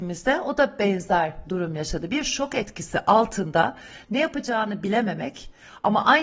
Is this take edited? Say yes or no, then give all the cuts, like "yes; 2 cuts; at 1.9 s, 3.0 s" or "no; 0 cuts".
no; 0 cuts